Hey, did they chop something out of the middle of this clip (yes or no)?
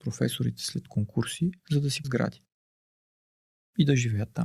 yes